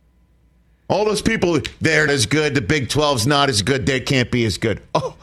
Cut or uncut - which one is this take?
cut